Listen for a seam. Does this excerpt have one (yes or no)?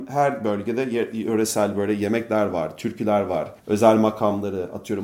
yes